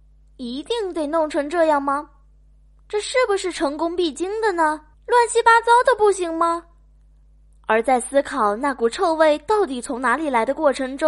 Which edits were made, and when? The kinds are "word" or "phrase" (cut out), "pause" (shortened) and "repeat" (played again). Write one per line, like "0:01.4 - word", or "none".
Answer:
0:04.9 - pause

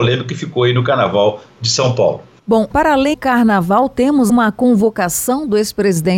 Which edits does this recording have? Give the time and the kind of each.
0:02.7 - word
0:03.1 - word
0:04.3 - word

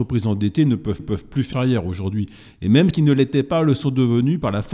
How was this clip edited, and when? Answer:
0:01.0 - repeat
0:01.5 - word
0:02.9 - word

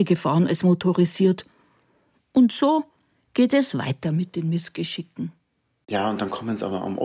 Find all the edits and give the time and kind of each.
none

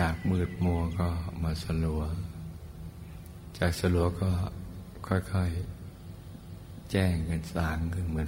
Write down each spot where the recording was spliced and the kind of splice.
0:06.4 - repeat

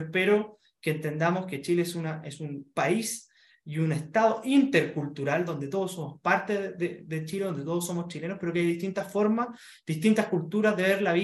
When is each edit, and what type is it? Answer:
none

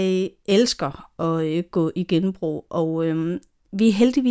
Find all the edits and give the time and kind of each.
none

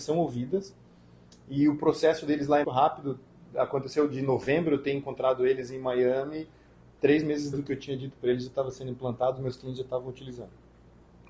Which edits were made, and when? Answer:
0:02.6 - word
0:07.5 - word

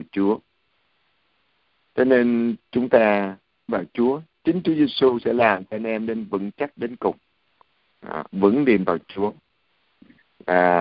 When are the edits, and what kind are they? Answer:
0:03.7 - word
0:08.3 - pause
0:08.9 - word

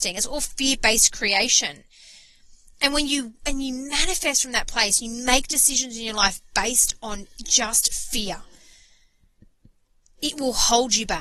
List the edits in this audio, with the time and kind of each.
none

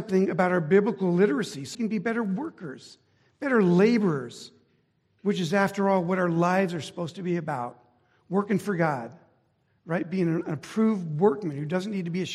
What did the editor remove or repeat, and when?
0:01.7 - word

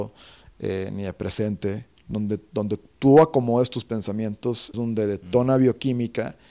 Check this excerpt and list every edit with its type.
0:04.7 - word

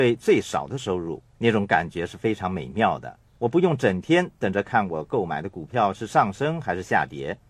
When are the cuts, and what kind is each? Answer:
0:01.3 - pause
0:03.3 - pause

